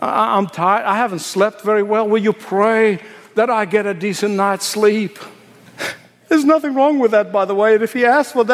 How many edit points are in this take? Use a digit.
0